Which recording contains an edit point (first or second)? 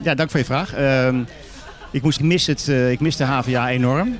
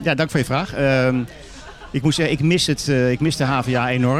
first